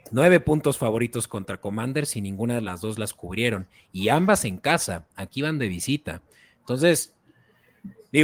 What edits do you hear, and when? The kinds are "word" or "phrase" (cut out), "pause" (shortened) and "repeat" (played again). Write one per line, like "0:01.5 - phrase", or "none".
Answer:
none